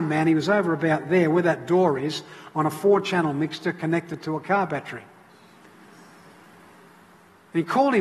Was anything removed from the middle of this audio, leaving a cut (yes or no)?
no